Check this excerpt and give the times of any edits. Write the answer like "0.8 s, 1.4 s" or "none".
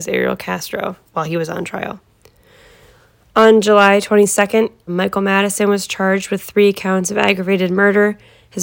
1.1 s, 4.9 s